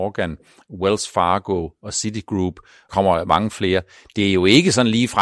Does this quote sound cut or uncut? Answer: cut